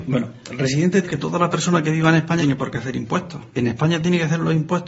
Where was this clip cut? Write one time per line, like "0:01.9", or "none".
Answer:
0:01.0
0:02.4
0:03.5